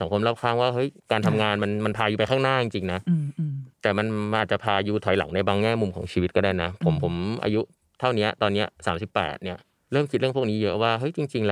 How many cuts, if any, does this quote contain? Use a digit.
2